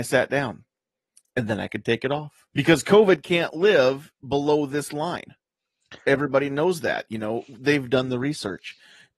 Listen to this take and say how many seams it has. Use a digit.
1